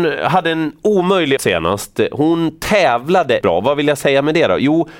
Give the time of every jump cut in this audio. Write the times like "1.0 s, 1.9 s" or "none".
1.4 s, 3.4 s